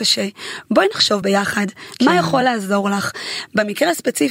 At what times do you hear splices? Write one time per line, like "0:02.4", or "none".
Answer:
none